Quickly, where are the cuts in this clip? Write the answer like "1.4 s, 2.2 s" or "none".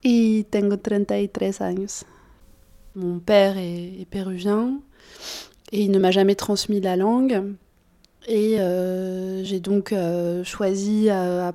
none